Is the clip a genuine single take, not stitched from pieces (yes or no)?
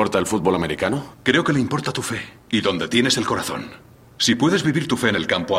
no